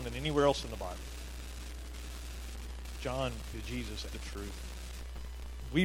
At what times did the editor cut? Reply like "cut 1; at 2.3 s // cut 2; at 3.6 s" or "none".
cut 1; at 3.5 s // cut 2; at 4.1 s